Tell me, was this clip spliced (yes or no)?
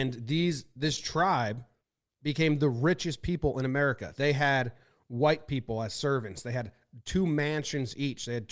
no